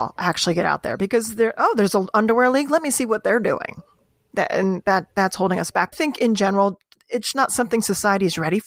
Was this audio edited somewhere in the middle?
yes; 2 cuts; at 5.9 s, 7.3 s

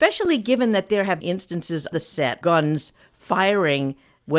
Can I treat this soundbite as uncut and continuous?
no; 3 cuts; at 1.2 s, 1.9 s, 2.4 s

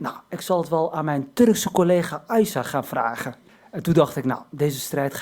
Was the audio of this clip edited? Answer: yes; 1 cut; at 3.5 s

